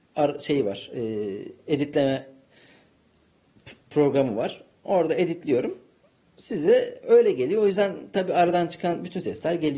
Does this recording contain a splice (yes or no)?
no